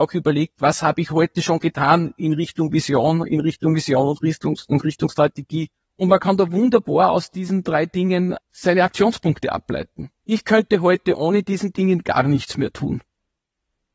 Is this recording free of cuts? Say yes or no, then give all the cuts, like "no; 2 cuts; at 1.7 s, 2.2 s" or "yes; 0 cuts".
no; 3 cuts; at 5.8 s, 8.4 s, 10.2 s